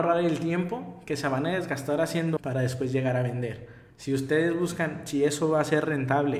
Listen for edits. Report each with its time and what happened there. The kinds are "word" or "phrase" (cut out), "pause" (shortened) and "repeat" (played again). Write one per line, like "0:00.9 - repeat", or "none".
0:02.4 - word
0:03.9 - pause